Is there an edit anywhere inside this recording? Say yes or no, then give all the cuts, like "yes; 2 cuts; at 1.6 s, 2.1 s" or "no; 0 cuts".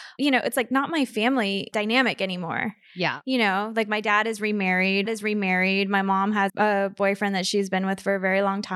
yes; 2 cuts; at 5.1 s, 6.5 s